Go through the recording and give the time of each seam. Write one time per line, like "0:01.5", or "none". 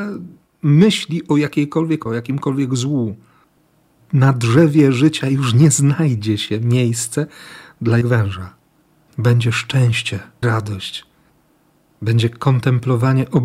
0:02.1
0:04.0
0:08.0
0:10.4